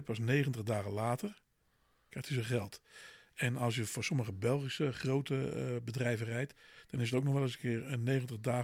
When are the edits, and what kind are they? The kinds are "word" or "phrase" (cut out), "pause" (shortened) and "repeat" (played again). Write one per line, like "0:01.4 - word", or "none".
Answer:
none